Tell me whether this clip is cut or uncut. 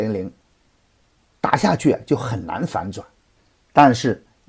uncut